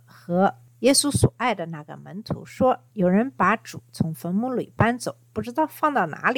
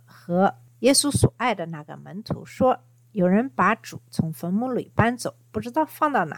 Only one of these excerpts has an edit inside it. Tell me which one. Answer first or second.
first